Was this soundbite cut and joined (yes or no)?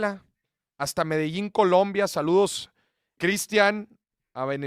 yes